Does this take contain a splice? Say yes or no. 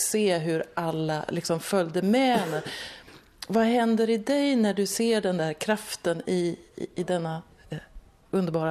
no